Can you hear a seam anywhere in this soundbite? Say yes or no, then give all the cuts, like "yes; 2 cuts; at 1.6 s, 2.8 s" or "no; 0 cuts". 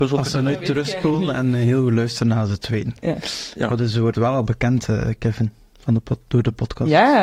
no; 0 cuts